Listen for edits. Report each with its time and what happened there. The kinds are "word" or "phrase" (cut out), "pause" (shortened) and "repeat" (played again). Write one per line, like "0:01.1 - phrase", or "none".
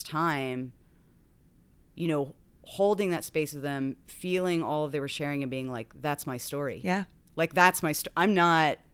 none